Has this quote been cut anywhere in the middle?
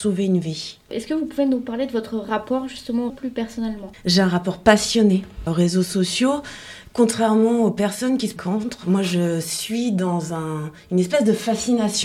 yes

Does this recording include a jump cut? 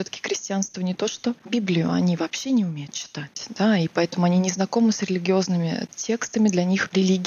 no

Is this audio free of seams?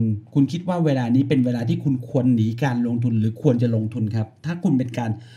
yes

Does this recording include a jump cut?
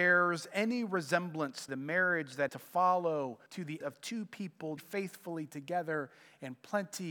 yes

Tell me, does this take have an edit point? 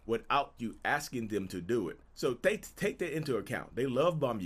yes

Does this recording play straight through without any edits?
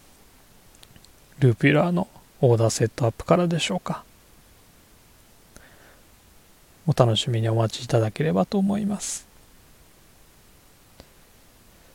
yes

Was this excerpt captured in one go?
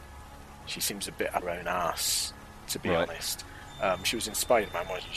no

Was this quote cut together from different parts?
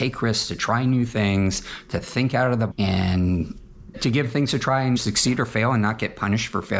yes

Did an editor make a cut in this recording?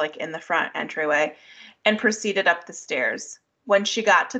no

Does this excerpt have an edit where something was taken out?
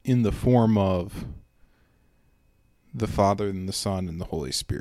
no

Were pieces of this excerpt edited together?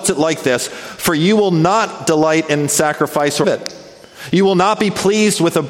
yes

